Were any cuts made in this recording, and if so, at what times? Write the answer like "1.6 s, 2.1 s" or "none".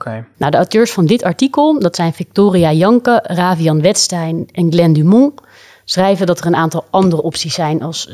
none